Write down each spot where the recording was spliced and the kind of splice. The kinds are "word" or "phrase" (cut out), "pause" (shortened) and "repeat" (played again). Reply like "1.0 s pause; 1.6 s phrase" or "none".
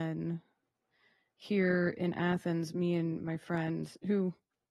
none

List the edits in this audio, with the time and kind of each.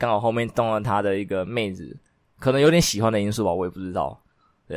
none

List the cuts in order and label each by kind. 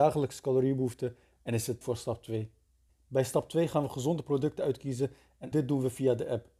1.8 s word; 5.5 s word

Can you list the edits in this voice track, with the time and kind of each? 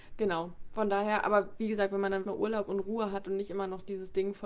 2.2 s word

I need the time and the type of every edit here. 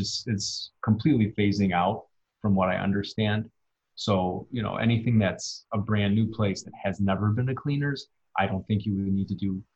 none

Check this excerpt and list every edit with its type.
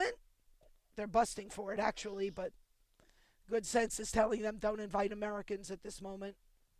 none

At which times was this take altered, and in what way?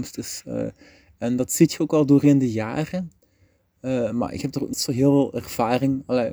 4.7 s word

